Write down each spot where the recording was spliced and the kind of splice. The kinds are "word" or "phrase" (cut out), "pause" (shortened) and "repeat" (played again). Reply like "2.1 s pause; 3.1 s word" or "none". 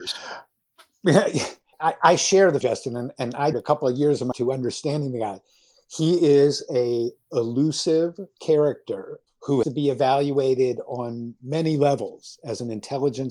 1.7 s word; 2.6 s word; 3.5 s word; 4.3 s word; 7.2 s word; 8.4 s word; 9.6 s word